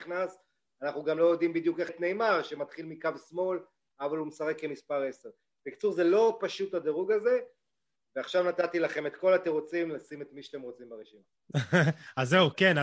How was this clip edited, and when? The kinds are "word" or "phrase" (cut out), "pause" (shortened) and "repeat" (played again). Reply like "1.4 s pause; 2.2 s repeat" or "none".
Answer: 1.9 s word

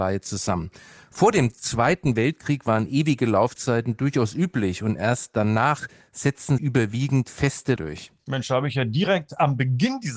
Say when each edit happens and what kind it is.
6.6 s word; 7.8 s word

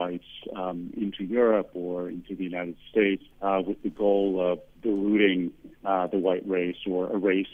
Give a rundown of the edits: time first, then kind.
3.3 s pause; 5.7 s pause

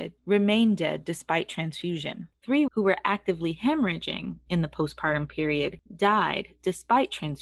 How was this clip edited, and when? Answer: 2.7 s word

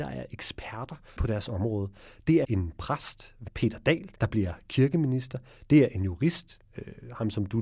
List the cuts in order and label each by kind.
1.2 s word; 2.4 s word; 3.5 s word; 4.2 s pause

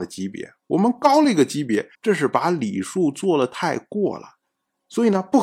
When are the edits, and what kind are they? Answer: 1.9 s pause

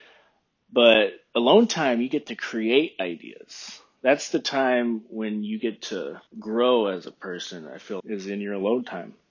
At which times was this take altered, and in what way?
6.3 s pause; 8.0 s word

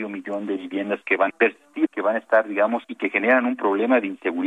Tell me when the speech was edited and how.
1.3 s word; 1.9 s word; 2.8 s word

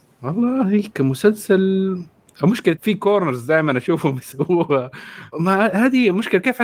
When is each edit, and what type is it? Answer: 2.8 s word; 5.3 s word

